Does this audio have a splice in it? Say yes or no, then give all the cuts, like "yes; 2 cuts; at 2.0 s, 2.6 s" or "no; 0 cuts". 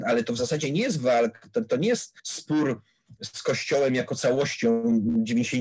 yes; 1 cut; at 2.2 s